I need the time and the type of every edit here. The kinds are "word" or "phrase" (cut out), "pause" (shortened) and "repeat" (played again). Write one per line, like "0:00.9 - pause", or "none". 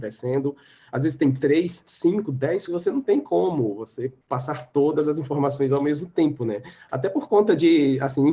0:02.7 - word
0:04.2 - pause